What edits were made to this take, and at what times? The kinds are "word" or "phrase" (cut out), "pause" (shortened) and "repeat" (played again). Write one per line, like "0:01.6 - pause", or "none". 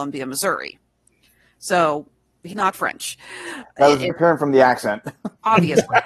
0:02.5 - word
0:04.1 - word